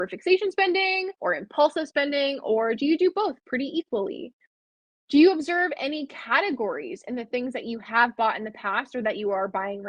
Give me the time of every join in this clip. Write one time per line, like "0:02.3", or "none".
0:01.1